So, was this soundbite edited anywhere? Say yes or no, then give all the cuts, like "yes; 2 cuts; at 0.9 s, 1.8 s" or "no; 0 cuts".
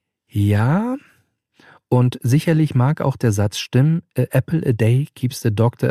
no; 0 cuts